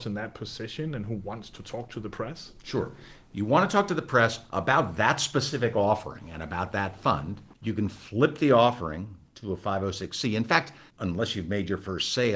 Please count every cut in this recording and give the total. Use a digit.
2